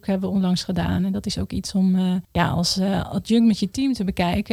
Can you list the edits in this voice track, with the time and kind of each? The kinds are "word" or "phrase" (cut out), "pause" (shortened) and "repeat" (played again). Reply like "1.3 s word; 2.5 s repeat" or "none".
2.2 s pause